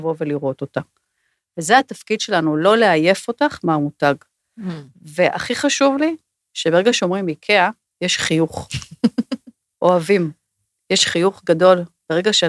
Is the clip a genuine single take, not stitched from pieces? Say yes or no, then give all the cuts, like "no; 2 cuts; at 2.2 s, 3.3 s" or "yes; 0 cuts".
yes; 0 cuts